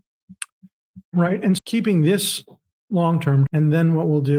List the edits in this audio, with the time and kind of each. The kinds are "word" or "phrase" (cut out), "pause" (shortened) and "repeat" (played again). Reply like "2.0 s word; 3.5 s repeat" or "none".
1.6 s word; 3.5 s word